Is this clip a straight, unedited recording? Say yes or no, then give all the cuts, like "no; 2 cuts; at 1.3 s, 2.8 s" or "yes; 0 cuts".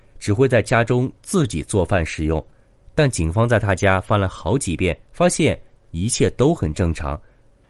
no; 1 cut; at 5.1 s